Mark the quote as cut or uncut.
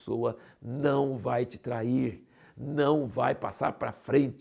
uncut